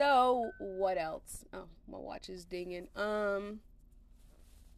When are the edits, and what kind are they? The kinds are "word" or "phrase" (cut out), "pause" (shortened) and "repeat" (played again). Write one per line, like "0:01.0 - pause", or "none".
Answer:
none